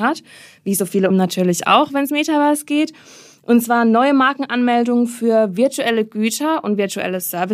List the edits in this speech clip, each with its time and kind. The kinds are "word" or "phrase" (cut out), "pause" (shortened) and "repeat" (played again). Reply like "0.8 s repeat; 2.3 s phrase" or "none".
1.1 s word; 2.1 s word